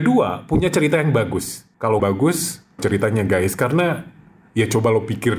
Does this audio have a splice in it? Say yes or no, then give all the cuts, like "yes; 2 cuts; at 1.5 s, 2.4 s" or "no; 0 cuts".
yes; 2 cuts; at 2.0 s, 2.8 s